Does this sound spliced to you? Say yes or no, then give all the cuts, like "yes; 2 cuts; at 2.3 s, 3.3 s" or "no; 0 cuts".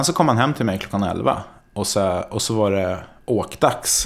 no; 0 cuts